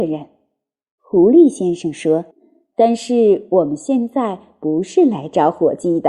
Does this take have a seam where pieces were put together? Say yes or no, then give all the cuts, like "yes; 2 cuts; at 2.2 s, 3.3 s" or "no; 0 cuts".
yes; 1 cut; at 2.3 s